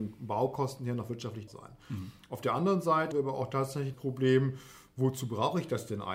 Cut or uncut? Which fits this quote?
cut